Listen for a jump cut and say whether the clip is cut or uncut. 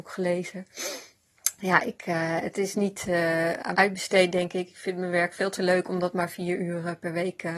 cut